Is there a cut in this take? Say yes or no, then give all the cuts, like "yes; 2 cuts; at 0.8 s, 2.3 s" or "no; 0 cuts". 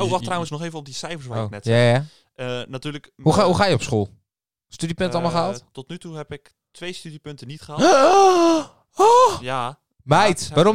no; 0 cuts